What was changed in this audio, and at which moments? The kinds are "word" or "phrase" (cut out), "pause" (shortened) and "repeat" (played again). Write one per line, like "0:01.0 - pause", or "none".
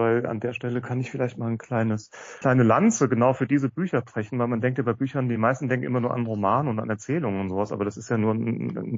0:02.4 - word